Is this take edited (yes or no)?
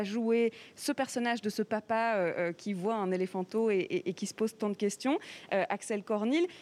no